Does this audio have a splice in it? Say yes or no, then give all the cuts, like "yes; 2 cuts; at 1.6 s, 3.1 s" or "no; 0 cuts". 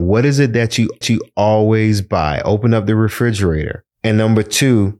yes; 1 cut; at 1.0 s